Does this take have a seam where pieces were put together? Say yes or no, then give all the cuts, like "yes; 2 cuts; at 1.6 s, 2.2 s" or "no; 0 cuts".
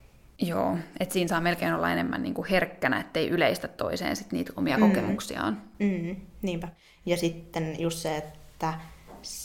no; 0 cuts